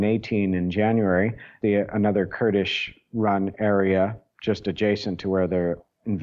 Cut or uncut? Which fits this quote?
cut